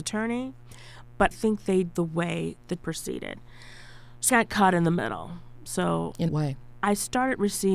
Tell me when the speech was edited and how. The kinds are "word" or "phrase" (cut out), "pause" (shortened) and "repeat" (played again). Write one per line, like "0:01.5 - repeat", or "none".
0:01.3 - word
0:02.0 - phrase
0:02.8 - word
0:04.3 - word
0:06.3 - word